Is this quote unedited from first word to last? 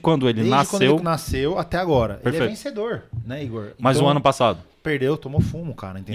yes; 0 cuts

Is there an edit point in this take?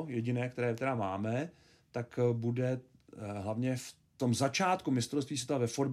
no; 0 cuts

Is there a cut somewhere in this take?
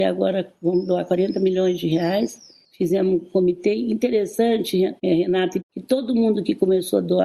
yes; 1 cut; at 5.6 s

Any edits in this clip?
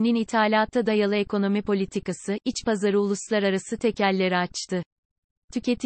no; 0 cuts

